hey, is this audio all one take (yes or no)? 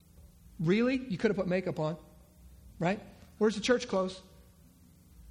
yes